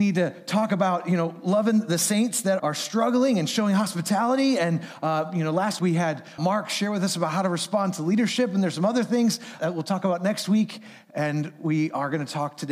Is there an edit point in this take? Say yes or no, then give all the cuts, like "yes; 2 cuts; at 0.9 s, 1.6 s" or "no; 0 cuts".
yes; 4 cuts; at 2.6 s, 5.8 s, 6.4 s, 9.6 s